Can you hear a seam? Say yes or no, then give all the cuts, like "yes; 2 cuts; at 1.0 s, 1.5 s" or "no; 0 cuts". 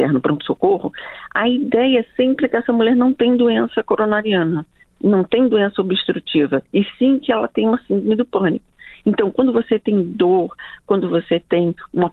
no; 0 cuts